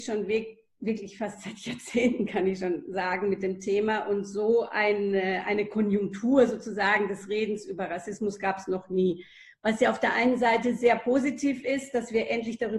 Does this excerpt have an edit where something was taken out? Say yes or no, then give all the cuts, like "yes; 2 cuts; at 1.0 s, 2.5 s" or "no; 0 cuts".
no; 0 cuts